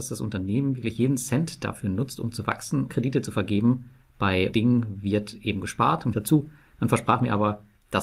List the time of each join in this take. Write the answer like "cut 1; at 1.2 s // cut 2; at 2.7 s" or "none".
cut 1; at 2.9 s // cut 2; at 4.5 s // cut 3; at 6.1 s